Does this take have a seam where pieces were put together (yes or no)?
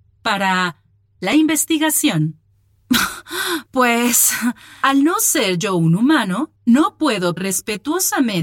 yes